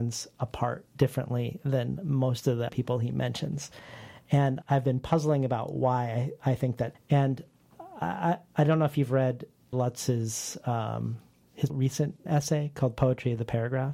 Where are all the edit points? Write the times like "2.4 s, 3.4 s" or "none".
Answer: 2.7 s, 4.6 s, 6.9 s, 9.7 s, 11.7 s, 12.3 s